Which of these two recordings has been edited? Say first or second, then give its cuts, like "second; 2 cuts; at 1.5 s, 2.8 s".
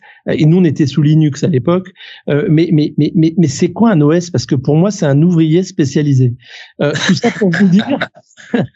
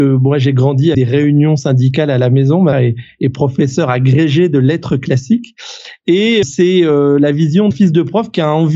second; 4 cuts; at 0.9 s, 2.7 s, 6.4 s, 7.7 s